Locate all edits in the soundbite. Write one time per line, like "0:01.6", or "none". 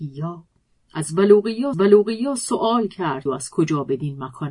0:01.7
0:03.3